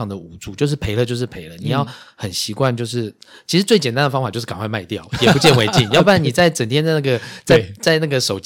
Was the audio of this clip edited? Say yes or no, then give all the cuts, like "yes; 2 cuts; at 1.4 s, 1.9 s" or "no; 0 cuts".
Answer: no; 0 cuts